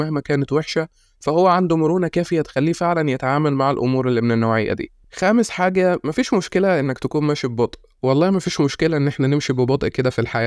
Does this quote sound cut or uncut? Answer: uncut